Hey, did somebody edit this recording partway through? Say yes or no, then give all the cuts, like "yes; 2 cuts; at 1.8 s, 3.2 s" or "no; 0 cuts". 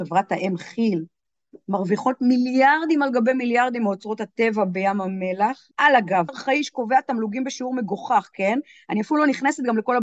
yes; 2 cuts; at 5.7 s, 6.3 s